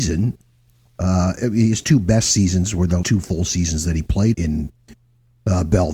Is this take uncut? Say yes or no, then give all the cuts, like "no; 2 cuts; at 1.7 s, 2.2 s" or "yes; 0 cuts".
no; 2 cuts; at 3.0 s, 4.3 s